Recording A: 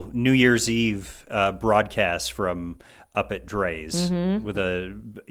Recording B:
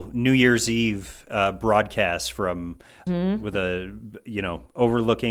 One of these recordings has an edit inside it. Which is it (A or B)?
B